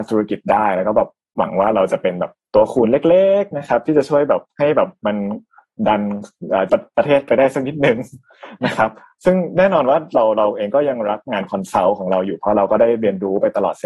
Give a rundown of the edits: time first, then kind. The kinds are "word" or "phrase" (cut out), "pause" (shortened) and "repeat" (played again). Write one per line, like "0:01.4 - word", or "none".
0:06.7 - word